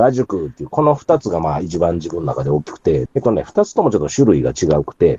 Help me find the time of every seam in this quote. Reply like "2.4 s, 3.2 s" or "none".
3.1 s